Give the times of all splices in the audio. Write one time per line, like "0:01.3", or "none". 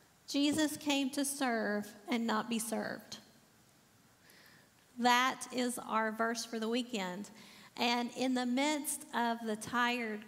none